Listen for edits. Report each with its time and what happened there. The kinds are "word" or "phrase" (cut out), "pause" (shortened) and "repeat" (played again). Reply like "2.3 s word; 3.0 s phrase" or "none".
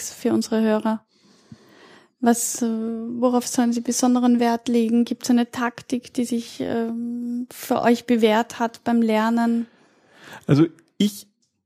none